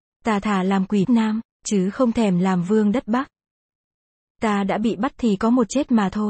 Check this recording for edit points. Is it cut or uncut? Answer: cut